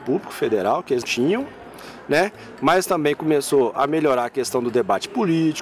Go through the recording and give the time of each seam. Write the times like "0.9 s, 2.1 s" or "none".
1.0 s